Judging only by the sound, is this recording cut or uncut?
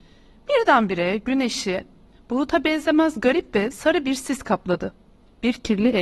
uncut